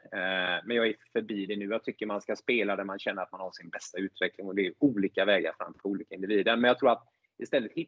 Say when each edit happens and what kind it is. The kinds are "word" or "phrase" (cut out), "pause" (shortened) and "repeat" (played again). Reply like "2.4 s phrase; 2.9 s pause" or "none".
none